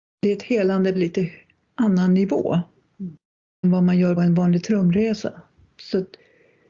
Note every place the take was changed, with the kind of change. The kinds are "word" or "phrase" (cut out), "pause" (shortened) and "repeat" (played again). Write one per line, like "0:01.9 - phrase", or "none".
0:00.9 - word
0:03.6 - word
0:04.2 - word